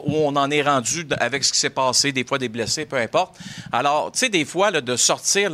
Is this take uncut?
yes; 0 cuts

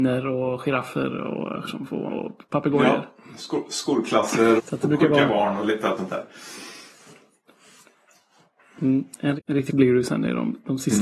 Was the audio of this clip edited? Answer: yes; 6 cuts; at 1.7 s, 2.1 s, 4.6 s, 6.0 s, 9.4 s, 9.7 s

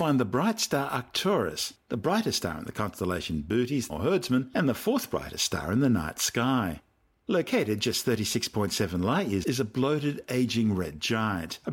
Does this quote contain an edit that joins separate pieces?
yes; 2 cuts; at 3.9 s, 9.4 s

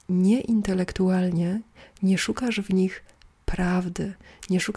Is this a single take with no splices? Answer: yes; 0 cuts

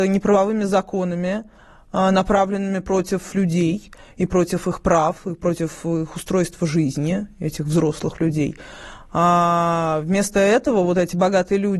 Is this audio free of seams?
no; 1 cut; at 3.3 s

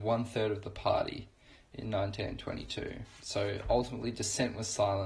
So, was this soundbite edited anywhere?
no; 0 cuts

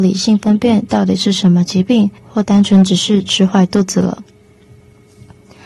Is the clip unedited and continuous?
no; 1 cut; at 2.2 s

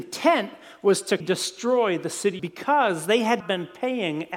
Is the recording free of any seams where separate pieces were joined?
no; 3 cuts; at 1.2 s, 2.4 s, 3.4 s

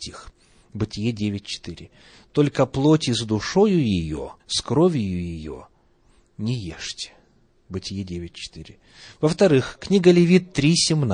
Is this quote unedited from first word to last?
no; 1 cut; at 4.4 s

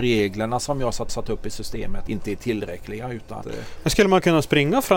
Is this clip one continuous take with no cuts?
no; 3 cuts; at 1.1 s, 2.1 s, 3.4 s

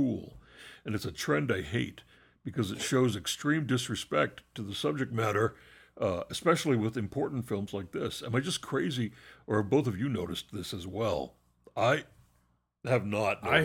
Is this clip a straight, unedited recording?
yes; 0 cuts

